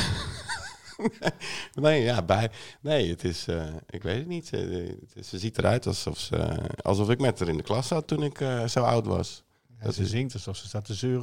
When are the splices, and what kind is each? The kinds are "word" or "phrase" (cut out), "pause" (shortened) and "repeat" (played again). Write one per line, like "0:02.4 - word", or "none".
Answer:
none